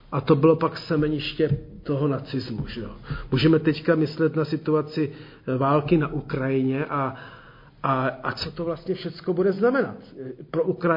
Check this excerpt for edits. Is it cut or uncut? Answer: uncut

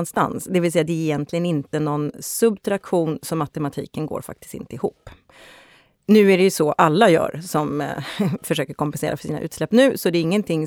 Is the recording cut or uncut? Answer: uncut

